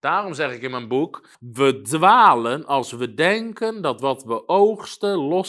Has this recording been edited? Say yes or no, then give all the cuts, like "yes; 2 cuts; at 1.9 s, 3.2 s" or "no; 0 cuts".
yes; 1 cut; at 1.3 s